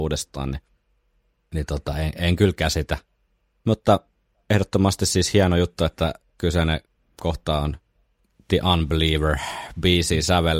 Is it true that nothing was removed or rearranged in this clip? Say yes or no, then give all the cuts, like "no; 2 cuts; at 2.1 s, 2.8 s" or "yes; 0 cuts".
yes; 0 cuts